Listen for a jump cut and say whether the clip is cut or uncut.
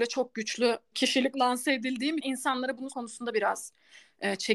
cut